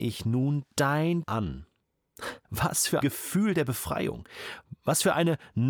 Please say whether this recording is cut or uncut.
cut